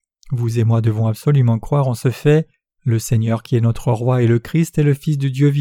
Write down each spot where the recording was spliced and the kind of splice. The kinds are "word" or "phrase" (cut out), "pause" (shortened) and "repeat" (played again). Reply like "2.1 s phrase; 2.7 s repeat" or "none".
2.7 s pause